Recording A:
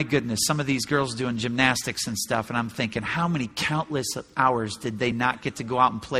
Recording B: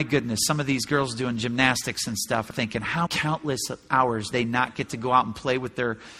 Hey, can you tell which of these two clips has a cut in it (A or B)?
B